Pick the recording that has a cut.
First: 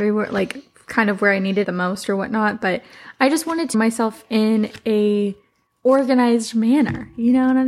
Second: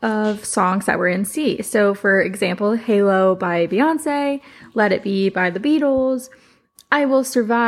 first; 2 cuts; at 1.6 s, 3.7 s

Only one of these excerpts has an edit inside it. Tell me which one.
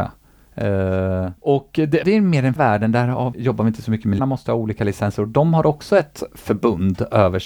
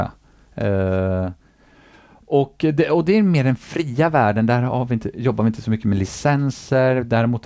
first; 5 cuts; at 1.4 s, 2.0 s, 2.6 s, 3.3 s, 4.2 s

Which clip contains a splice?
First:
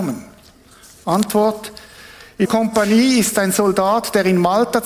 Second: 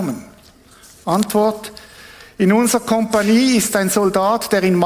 first; 1 cut; at 2.5 s

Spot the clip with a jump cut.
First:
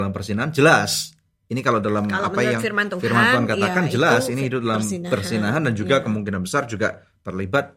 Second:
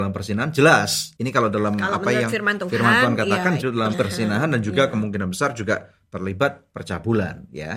second; 3 cuts; at 1.2 s, 3.6 s, 3.9 s

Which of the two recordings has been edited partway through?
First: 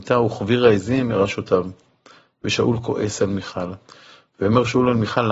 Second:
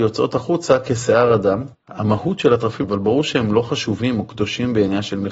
second; 2 cuts; at 1.7 s, 2.8 s

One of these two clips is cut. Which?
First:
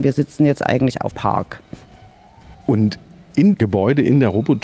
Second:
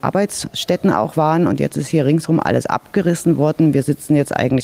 first; 2 cuts; at 1.1 s, 3.5 s

